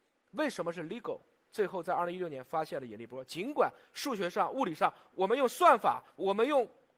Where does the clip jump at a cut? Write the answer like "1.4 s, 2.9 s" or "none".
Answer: none

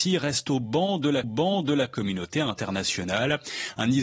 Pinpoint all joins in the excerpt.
1.2 s

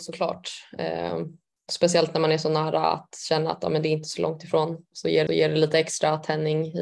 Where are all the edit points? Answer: 4.9 s, 5.3 s

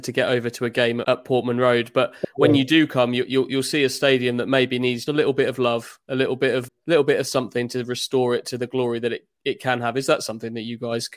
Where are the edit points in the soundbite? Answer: 1.0 s, 5.1 s, 6.7 s

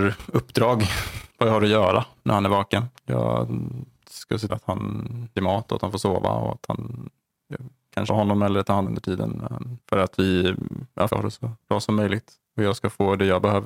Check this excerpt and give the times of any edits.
1.3 s, 3.0 s, 4.5 s, 5.4 s, 8.1 s, 8.8 s, 9.8 s, 11.1 s

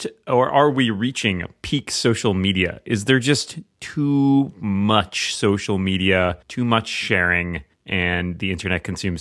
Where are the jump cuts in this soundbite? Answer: 6.4 s, 7.7 s

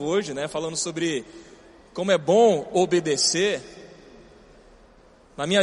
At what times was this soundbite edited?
none

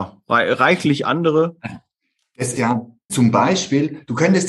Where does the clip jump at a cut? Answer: 2.5 s, 3.1 s

